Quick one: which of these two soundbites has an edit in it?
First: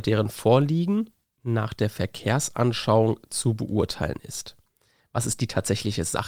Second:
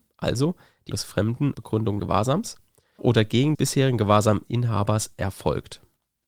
second; 5 cuts; at 0.9 s, 1.5 s, 2.0 s, 3.0 s, 3.5 s

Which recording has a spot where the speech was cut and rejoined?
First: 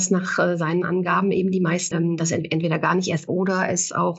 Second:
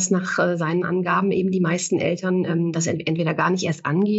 first; 2 cuts; at 1.9 s, 3.3 s

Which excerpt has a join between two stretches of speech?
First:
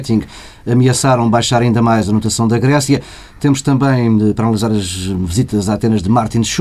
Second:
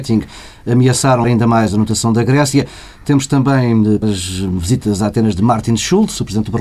second; 2 cuts; at 1.2 s, 4.0 s

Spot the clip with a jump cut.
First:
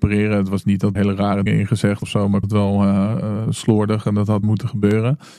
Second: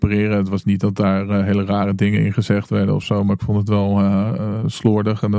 first; 5 cuts; at 0.9 s, 1.5 s, 2.0 s, 2.4 s, 4.4 s

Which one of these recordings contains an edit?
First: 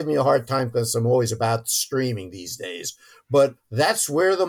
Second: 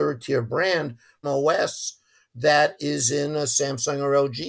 second; 1 cut; at 1.2 s

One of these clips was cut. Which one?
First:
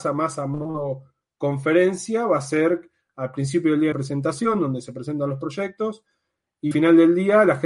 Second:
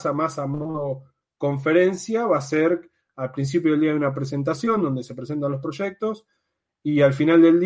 first; 2 cuts; at 3.9 s, 6.7 s

